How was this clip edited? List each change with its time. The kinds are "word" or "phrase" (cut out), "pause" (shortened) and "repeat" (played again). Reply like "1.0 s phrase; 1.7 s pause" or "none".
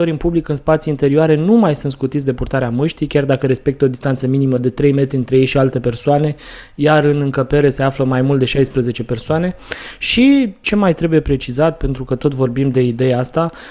none